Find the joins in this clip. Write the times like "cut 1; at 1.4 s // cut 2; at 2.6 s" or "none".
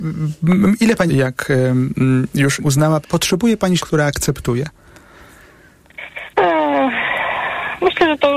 cut 1; at 1.1 s // cut 2; at 2.6 s // cut 3; at 3.0 s // cut 4; at 3.8 s // cut 5; at 6.3 s